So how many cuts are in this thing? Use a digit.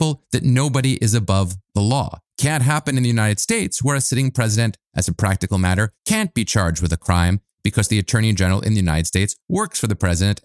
3